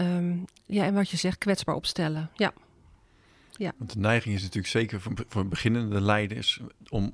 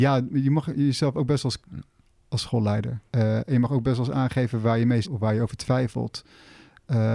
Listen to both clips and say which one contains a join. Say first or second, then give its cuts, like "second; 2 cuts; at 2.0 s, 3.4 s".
second; 3 cuts; at 1.6 s, 3.1 s, 5.0 s